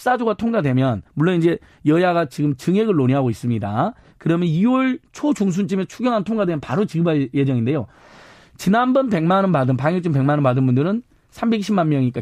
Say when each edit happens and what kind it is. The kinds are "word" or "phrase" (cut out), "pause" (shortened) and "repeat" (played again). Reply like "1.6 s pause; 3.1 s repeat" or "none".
1.1 s pause

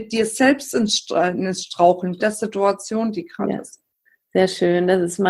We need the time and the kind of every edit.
2.2 s phrase

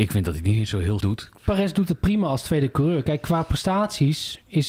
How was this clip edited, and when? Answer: 1.0 s word

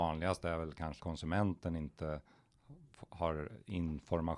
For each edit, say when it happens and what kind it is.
1.0 s word

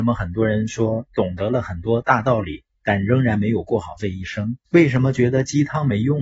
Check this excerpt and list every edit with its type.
4.7 s pause

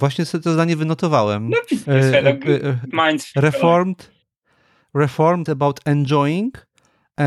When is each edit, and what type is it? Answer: 1.9 s word; 2.9 s word; 5.5 s phrase

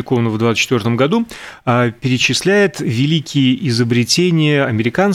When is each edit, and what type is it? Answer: none

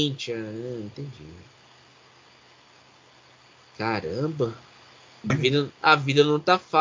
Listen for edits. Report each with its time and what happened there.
5.3 s word; 5.7 s pause

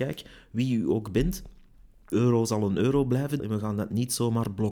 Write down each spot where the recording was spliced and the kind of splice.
2.1 s word; 3.4 s word

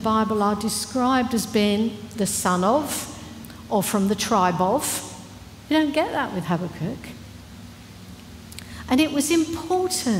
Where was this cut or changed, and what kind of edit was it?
none

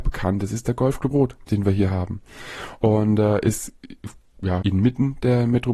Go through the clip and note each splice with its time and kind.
1.1 s phrase; 4.6 s phrase

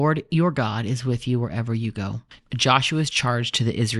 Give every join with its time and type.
none

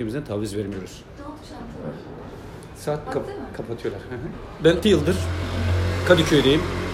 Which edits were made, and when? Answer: 3.1 s word; 4.8 s word

